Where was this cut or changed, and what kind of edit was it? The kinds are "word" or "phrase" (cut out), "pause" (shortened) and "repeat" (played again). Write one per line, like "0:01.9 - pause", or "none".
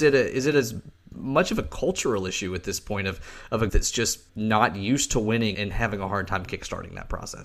0:03.7 - word
0:04.3 - pause
0:05.5 - word